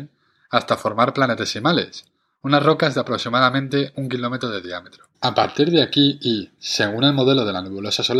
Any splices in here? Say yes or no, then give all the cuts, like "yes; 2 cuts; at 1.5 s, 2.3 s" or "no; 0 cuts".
yes; 1 cut; at 5.1 s